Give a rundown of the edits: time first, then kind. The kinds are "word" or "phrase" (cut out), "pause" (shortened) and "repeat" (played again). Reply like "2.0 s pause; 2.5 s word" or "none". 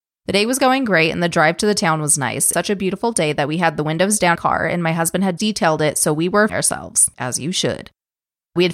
2.5 s word; 4.3 s phrase; 5.4 s word; 6.5 s word; 7.1 s pause